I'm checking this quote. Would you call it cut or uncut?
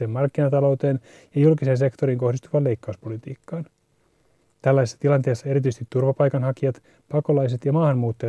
uncut